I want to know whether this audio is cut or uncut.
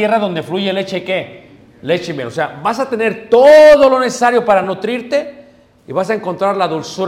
uncut